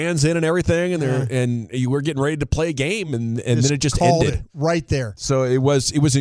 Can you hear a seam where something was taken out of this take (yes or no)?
no